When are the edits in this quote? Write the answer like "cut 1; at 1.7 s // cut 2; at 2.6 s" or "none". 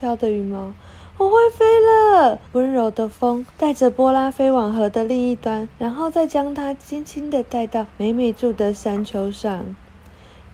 cut 1; at 2.5 s // cut 2; at 3.5 s // cut 3; at 5.7 s // cut 4; at 7.9 s